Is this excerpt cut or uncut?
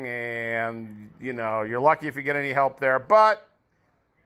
uncut